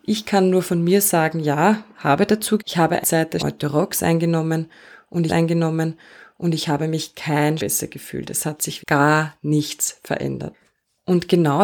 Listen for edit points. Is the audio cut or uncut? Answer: cut